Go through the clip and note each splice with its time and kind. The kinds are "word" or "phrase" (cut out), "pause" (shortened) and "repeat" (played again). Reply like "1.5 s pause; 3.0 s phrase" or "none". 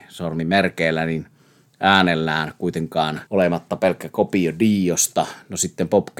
3.3 s pause